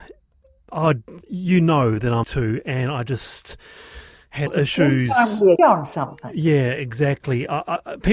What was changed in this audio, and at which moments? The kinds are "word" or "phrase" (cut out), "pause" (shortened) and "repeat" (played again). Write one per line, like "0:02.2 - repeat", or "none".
0:01.2 - pause
0:02.2 - phrase
0:04.5 - word
0:05.6 - word

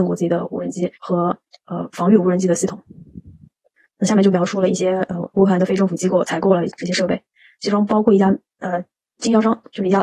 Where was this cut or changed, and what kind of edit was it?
0:01.0 - pause

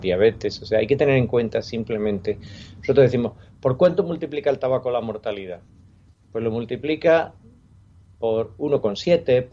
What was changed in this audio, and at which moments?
none

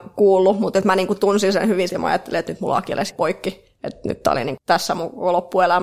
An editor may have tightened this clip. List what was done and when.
0:01.9 - word
0:03.1 - word
0:04.6 - word

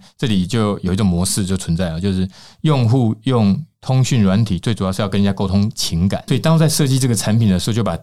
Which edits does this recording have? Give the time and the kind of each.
0:06.3 - word

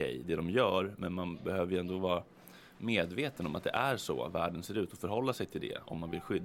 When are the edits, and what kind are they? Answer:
none

